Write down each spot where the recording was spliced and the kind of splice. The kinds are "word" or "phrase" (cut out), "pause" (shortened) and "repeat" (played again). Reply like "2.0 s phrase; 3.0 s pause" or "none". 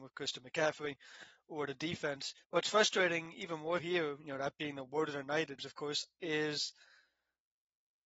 2.4 s pause; 3.8 s word; 5.6 s word